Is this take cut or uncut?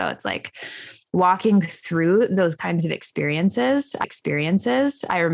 cut